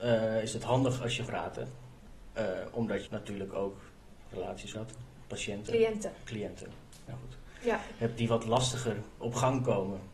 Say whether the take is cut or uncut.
cut